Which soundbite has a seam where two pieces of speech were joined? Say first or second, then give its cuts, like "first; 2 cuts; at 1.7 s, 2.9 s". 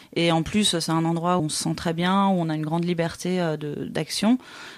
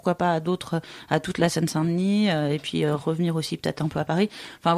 first; 1 cut; at 1.4 s